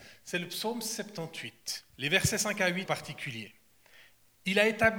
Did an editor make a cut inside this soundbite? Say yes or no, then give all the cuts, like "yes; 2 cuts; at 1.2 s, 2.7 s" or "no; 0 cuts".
yes; 2 cuts; at 1.9 s, 2.9 s